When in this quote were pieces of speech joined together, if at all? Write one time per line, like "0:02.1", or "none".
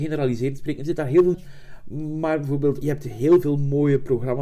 0:01.3
0:02.8